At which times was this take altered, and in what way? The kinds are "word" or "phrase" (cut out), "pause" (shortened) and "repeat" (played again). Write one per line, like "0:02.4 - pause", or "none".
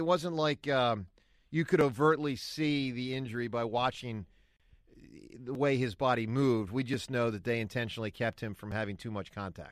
none